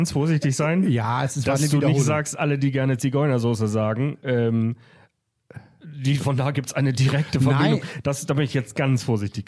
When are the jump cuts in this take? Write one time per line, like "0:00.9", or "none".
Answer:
none